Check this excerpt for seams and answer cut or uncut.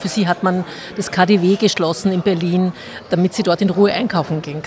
uncut